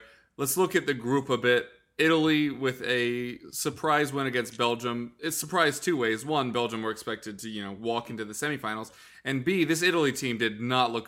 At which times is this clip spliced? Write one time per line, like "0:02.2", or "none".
none